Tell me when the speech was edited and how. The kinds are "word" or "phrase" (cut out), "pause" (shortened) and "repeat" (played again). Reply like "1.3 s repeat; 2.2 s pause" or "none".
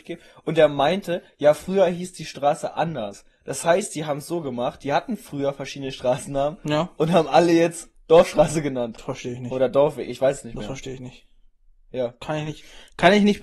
none